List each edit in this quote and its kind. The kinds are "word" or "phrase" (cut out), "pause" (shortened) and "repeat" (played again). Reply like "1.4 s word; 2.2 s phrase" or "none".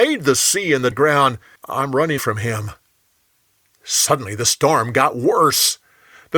0.9 s word; 1.6 s word; 2.2 s word